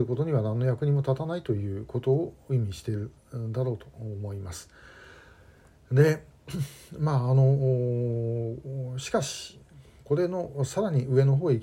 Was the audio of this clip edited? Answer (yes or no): no